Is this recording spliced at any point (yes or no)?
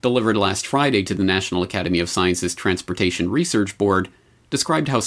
no